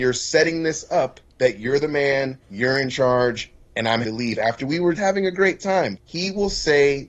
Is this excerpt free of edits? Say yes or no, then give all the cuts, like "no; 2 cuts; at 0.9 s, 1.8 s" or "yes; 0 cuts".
no; 5 cuts; at 1.3 s, 2.4 s, 4.0 s, 5.0 s, 6.0 s